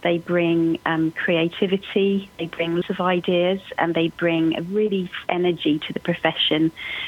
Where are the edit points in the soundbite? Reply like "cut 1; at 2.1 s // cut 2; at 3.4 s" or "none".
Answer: cut 1; at 2.8 s // cut 2; at 5.2 s